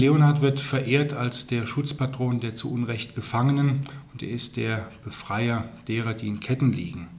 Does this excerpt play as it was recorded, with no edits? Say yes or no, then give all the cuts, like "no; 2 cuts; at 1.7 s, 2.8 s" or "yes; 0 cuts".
yes; 0 cuts